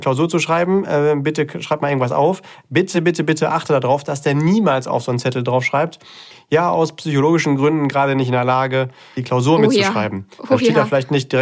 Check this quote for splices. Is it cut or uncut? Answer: uncut